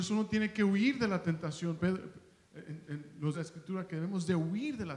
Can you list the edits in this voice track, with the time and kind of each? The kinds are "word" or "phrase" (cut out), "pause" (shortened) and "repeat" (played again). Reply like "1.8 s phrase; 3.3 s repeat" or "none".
3.3 s word

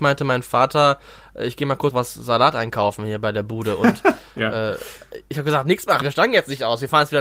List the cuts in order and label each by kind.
1.9 s word; 6.0 s word

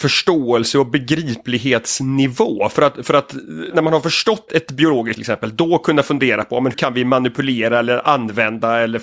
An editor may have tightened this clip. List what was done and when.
3.7 s word; 4.5 s word; 5.1 s word; 6.7 s word

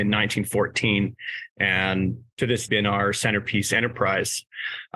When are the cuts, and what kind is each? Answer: 2.7 s phrase

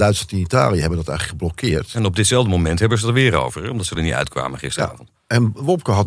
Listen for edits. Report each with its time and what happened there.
none

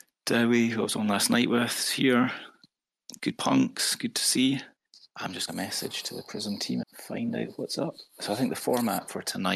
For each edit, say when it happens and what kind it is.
3.3 s word; 4.8 s pause; 5.5 s phrase; 6.8 s word; 8.1 s pause

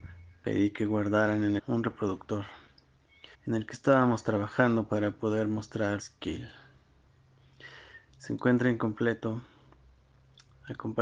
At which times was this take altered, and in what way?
1.6 s phrase; 3.3 s pause; 6.0 s phrase

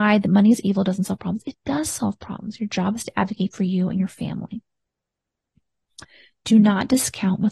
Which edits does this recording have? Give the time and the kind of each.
none

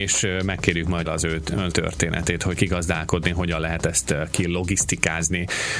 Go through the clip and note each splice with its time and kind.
1.1 s phrase; 1.7 s word; 2.6 s phrase

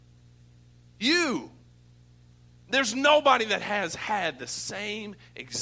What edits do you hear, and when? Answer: none

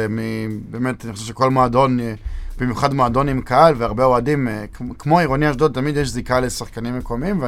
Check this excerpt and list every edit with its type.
none

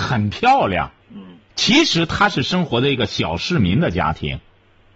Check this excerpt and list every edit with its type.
1.0 s pause

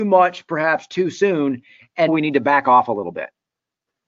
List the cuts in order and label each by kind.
2.1 s word

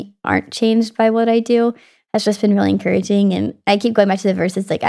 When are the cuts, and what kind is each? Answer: none

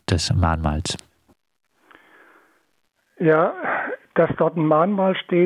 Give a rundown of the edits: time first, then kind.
none

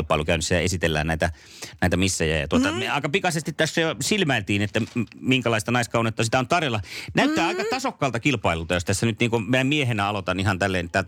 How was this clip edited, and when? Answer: none

